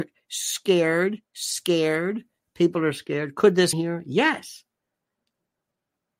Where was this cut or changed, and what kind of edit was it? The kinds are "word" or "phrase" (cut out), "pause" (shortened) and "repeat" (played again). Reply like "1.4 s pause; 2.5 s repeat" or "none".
1.3 s pause; 3.7 s word